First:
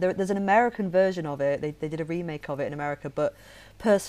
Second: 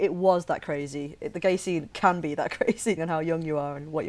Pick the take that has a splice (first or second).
second